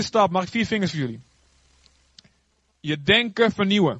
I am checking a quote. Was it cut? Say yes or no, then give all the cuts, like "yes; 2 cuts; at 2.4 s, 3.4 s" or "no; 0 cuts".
no; 0 cuts